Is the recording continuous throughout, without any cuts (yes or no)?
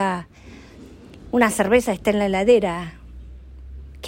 yes